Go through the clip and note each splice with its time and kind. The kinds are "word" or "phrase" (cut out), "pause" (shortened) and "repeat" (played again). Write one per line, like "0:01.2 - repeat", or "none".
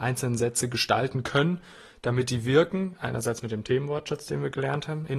none

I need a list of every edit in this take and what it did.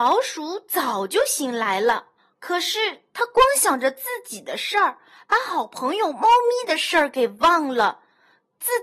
0:02.2 - pause

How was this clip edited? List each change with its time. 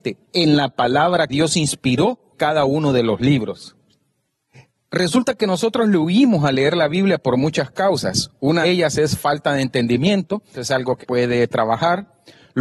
0:01.3 - word
0:02.3 - word
0:08.6 - word
0:10.5 - word
0:11.0 - word

